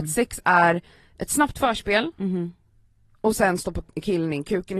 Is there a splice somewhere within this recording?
no; 0 cuts

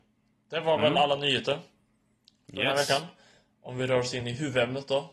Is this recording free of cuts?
yes; 0 cuts

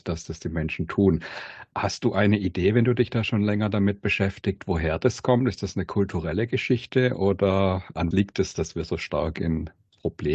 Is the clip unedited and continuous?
no; 1 cut; at 8.1 s

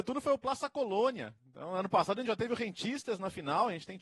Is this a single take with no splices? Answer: yes; 0 cuts

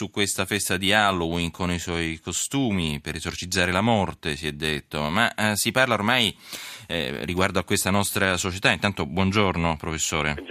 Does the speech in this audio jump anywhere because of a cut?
no; 0 cuts

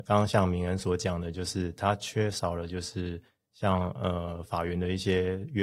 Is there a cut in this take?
no; 0 cuts

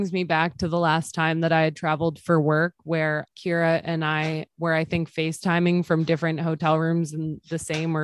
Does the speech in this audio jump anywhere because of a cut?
yes; 1 cut; at 3.3 s

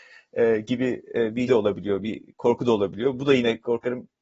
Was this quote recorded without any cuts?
no; 1 cut; at 1.5 s

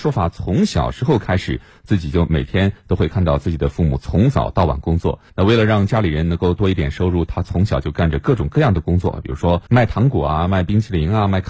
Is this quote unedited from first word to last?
no; 2 cuts; at 5.3 s, 9.7 s

